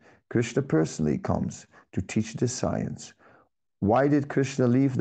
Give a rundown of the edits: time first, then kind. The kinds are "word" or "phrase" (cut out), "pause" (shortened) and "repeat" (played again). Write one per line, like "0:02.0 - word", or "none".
none

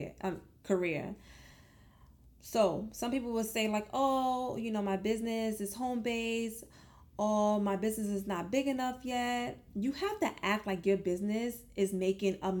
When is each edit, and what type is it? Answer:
none

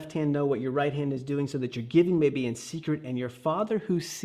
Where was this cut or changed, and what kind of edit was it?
none

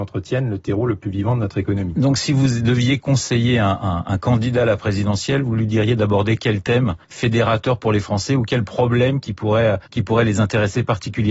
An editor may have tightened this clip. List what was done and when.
0:07.0 - pause
0:09.9 - pause

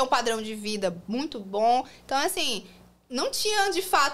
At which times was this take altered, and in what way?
none

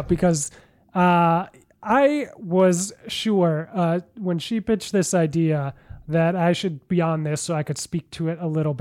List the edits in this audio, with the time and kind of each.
none

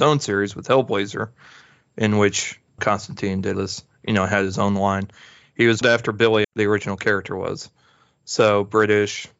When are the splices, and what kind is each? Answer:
0:02.8 - word
0:03.5 - word
0:05.8 - word
0:06.4 - word

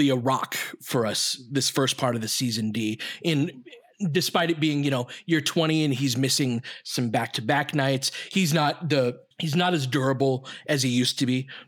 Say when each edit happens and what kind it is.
0:09.3 - pause

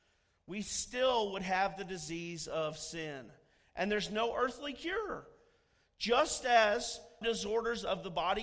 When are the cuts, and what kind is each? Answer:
0:07.2 - word

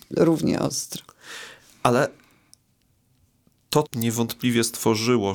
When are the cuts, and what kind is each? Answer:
0:03.8 - word

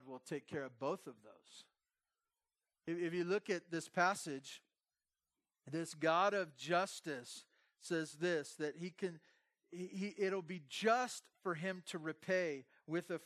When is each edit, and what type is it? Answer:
none

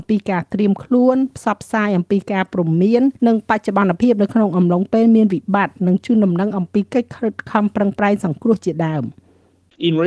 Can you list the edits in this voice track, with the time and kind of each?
0:03.2 - pause

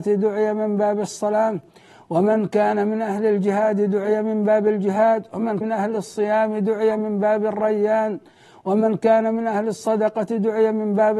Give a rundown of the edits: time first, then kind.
0:05.6 - word

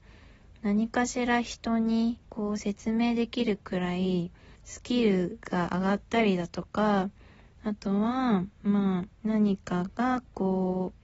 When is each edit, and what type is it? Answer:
0:02.2 - pause
0:04.6 - pause
0:09.1 - pause

